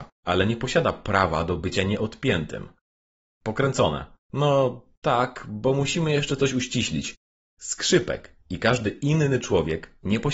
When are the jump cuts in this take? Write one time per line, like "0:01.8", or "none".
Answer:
none